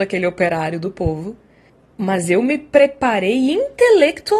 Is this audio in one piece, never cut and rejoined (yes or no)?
no